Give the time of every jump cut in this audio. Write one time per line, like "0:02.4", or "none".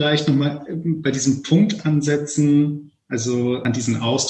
none